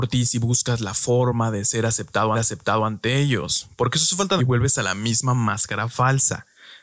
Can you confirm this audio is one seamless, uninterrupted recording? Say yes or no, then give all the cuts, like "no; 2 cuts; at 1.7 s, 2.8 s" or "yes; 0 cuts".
no; 2 cuts; at 2.3 s, 4.4 s